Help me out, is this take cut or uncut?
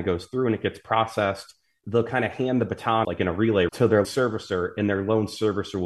cut